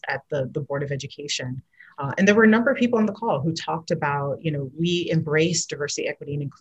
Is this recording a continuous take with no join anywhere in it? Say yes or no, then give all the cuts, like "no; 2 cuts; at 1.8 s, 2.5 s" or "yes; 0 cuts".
yes; 0 cuts